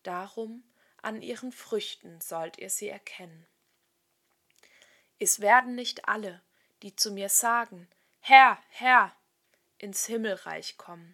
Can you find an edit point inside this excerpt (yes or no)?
no